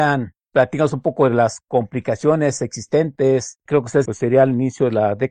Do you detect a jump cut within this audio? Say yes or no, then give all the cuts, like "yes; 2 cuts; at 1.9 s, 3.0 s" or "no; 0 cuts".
yes; 1 cut; at 4.1 s